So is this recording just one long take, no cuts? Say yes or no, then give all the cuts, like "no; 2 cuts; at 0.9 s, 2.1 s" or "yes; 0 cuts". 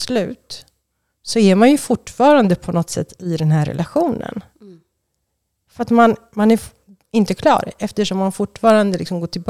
yes; 0 cuts